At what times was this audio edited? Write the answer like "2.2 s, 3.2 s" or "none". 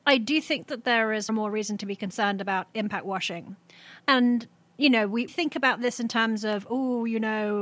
1.3 s, 5.3 s